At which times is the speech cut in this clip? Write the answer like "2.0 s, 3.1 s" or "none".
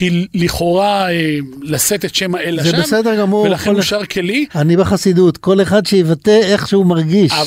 4.5 s